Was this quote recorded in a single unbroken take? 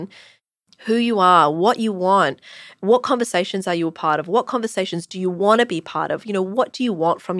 yes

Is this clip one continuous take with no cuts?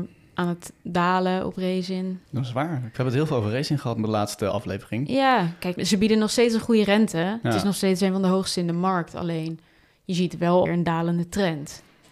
no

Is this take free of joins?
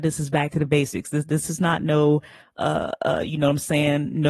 yes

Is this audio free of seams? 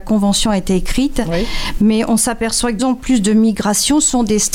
no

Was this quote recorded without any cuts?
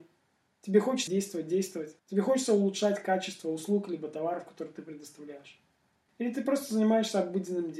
no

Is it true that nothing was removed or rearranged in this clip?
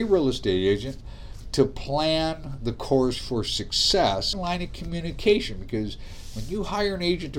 no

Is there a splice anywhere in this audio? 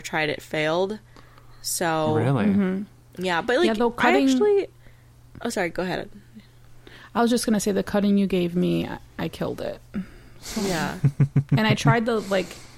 no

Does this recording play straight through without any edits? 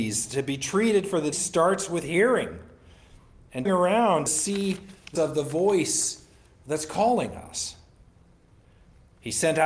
no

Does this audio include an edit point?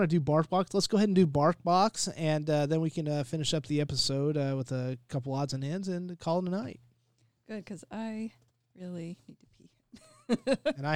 no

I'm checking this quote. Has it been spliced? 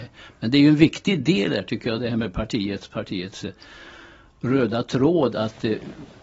no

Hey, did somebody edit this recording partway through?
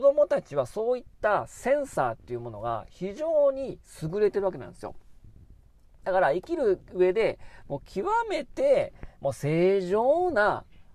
no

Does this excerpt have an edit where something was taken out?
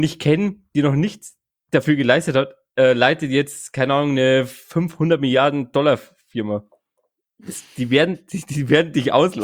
no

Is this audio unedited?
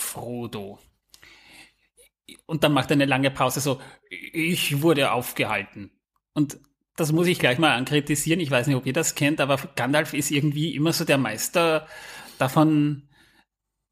yes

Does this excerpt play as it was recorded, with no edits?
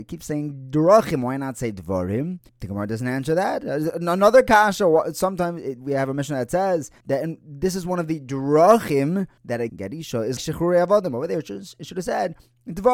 no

